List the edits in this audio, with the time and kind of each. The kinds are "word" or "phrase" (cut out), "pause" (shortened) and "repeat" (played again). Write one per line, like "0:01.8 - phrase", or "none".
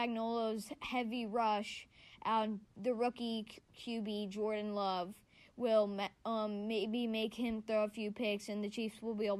none